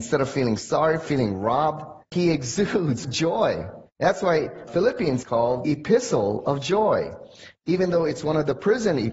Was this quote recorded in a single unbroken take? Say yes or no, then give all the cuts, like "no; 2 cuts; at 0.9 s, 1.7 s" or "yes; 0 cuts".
no; 6 cuts; at 1.1 s, 2.0 s, 3.0 s, 3.9 s, 5.2 s, 5.6 s